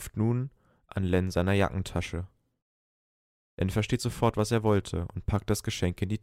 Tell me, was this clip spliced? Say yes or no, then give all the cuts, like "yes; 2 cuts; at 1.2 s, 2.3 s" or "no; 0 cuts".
no; 0 cuts